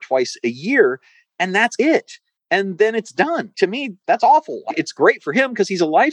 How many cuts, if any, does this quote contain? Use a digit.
0